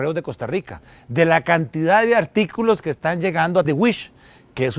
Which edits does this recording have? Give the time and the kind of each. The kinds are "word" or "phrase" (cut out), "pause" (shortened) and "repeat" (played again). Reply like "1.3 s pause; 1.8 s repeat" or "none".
3.6 s word